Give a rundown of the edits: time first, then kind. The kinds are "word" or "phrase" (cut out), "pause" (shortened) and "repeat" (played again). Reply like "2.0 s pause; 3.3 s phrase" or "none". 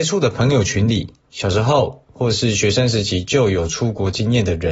1.2 s pause